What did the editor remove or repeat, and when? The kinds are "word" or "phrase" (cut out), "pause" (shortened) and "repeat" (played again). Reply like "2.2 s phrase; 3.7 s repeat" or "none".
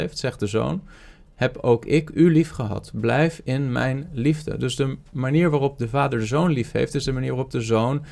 none